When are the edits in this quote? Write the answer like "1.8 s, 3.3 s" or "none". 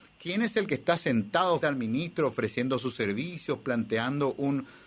1.6 s